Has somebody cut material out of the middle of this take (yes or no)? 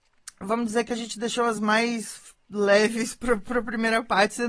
no